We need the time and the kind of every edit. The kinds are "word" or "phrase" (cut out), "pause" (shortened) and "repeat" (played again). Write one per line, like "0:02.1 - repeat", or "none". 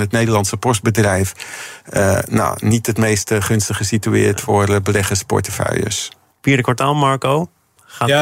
0:06.3 - pause